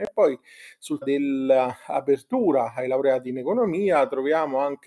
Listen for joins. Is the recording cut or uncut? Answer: cut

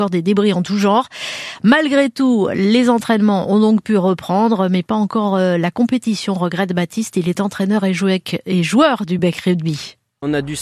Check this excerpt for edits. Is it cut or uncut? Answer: uncut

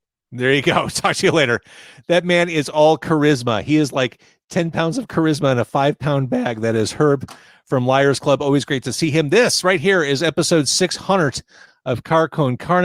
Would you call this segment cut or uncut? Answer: uncut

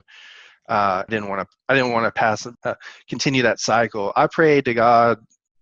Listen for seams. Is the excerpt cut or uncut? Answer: cut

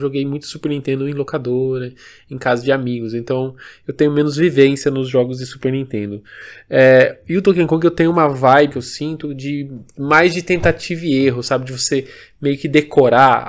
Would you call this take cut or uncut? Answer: cut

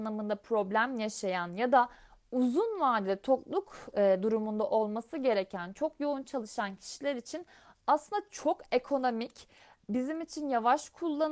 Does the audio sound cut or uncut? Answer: uncut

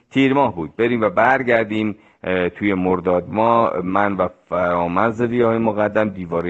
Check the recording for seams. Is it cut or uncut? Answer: uncut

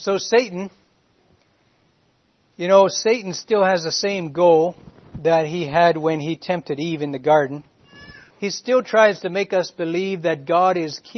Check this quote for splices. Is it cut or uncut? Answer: cut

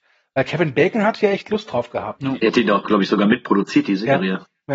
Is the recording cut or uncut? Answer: uncut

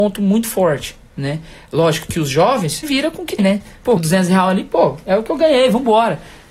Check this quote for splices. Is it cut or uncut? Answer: cut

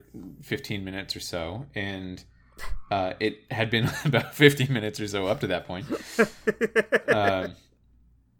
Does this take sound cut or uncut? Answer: uncut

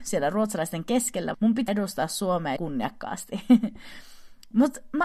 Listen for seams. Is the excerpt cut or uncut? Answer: cut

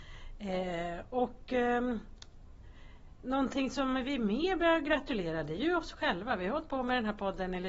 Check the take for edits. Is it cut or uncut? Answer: uncut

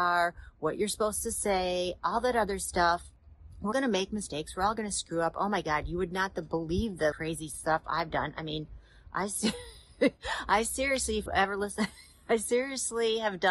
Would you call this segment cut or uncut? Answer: cut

